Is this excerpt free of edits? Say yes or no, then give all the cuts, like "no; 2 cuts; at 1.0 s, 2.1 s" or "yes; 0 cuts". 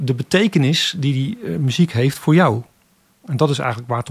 yes; 0 cuts